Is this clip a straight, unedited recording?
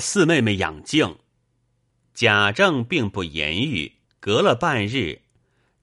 no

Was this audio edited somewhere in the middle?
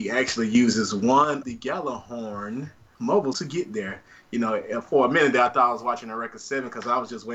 yes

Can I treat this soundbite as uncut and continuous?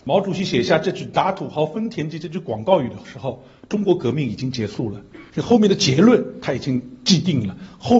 no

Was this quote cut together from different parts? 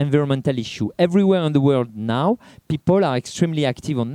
no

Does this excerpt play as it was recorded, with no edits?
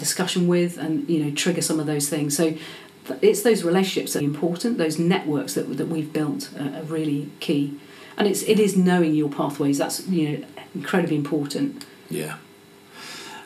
no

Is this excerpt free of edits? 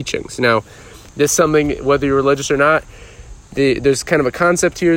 yes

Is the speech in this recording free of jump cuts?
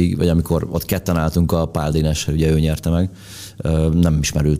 yes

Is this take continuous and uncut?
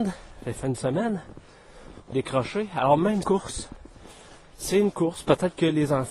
no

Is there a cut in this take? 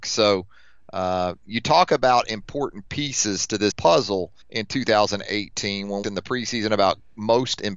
yes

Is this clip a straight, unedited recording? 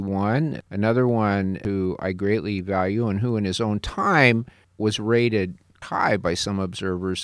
no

